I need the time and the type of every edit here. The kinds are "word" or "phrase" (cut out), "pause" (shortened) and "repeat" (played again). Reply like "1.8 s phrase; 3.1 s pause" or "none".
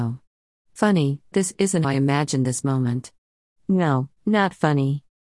1.3 s word; 1.8 s word; 4.2 s pause